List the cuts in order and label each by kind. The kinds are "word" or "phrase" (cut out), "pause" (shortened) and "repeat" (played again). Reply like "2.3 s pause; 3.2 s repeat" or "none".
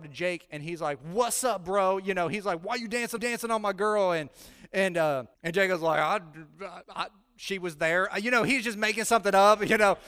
3.2 s repeat; 5.3 s pause; 6.8 s pause